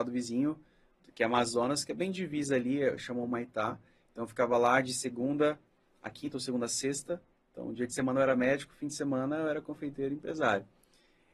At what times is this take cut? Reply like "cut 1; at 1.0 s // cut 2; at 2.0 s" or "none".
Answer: none